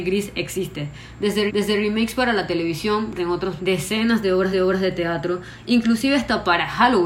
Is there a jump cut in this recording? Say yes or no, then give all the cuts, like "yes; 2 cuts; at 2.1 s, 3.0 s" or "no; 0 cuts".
yes; 4 cuts; at 1.5 s, 3.2 s, 3.6 s, 4.5 s